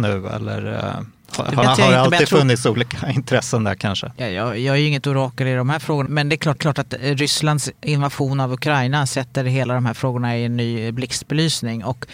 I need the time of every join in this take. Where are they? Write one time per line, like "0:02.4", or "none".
0:01.6
0:04.2
0:06.1
0:06.6